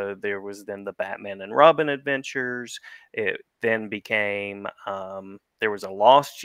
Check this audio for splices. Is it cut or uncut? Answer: uncut